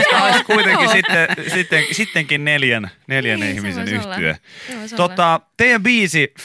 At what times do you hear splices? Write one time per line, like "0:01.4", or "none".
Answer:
none